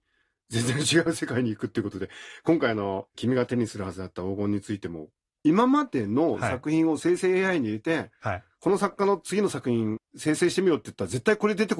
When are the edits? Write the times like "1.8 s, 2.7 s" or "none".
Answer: none